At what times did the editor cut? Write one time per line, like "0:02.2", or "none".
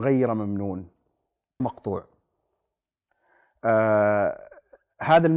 0:01.6